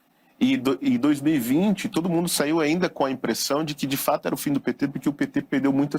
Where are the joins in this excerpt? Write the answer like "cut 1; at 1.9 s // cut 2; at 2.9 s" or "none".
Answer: none

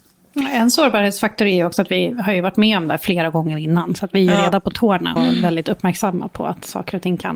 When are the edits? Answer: cut 1; at 5.2 s

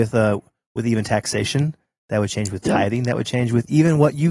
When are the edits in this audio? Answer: none

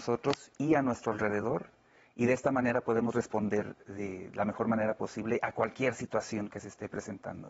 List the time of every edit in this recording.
none

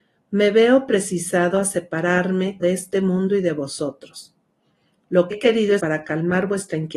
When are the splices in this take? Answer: cut 1; at 2.6 s // cut 2; at 5.3 s // cut 3; at 5.8 s

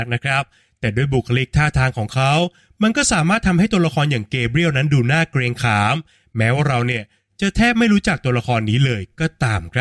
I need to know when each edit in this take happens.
none

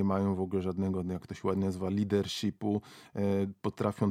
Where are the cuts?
none

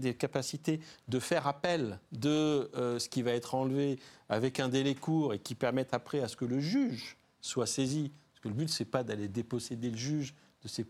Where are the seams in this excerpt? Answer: cut 1; at 2.1 s

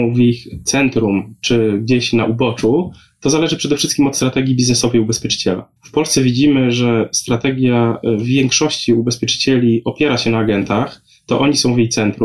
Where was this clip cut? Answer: cut 1; at 5.8 s

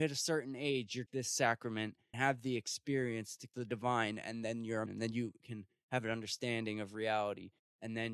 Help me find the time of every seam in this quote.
cut 1; at 1.1 s // cut 2; at 2.1 s // cut 3; at 3.5 s // cut 4; at 4.9 s

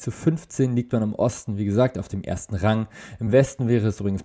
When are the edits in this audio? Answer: none

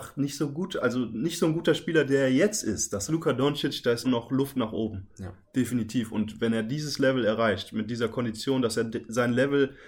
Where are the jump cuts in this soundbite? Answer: cut 1; at 3.1 s // cut 2; at 4.0 s

